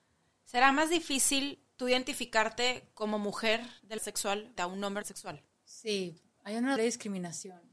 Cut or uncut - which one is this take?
cut